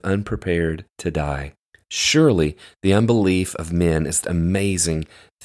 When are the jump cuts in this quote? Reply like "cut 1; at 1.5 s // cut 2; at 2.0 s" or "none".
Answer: cut 1; at 0.9 s // cut 2; at 4.2 s